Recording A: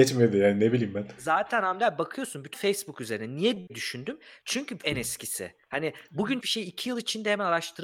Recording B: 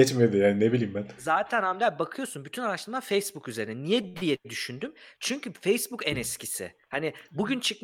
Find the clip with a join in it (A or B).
A